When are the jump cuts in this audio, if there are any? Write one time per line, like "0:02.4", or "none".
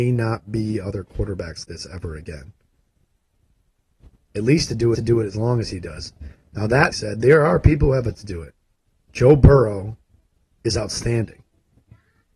0:01.6
0:04.9
0:06.9
0:08.1
0:09.1
0:10.2